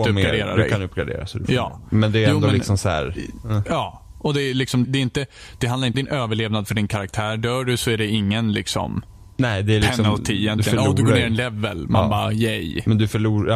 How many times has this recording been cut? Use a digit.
2